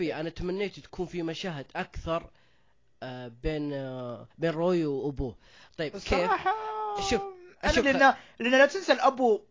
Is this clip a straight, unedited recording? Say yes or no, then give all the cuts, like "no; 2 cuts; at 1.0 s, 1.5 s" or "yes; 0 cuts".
no; 2 cuts; at 4.3 s, 7.8 s